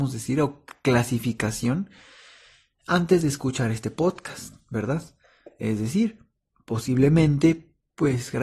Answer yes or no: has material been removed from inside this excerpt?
no